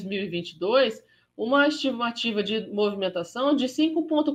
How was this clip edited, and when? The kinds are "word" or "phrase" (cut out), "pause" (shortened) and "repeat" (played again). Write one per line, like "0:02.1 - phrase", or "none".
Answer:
none